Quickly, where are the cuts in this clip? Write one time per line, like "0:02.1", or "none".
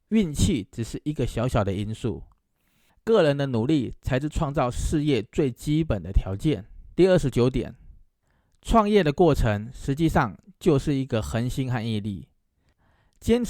0:06.9